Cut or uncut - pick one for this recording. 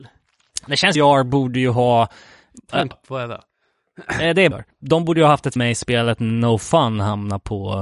cut